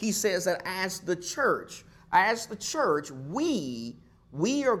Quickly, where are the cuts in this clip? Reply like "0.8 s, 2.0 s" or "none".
none